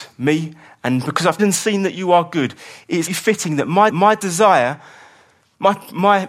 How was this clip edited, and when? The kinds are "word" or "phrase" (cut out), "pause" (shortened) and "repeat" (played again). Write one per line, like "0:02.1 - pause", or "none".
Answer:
0:01.4 - word
0:03.1 - word
0:03.9 - repeat

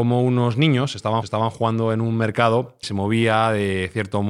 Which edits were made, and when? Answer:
0:01.2 - repeat
0:02.8 - phrase

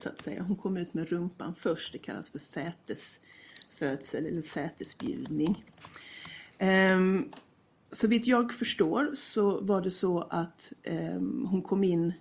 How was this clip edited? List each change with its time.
none

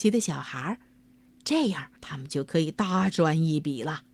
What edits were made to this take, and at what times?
0:02.0 - pause

